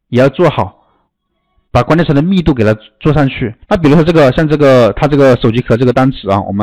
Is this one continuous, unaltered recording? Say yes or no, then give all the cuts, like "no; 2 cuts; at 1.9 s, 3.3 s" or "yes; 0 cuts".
no; 1 cut; at 3.6 s